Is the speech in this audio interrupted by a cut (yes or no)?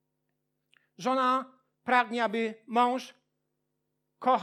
no